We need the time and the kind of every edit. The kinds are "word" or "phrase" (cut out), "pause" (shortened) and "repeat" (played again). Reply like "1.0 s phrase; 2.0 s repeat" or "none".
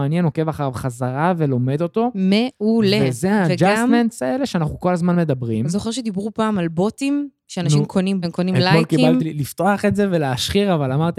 8.2 s word; 9.2 s phrase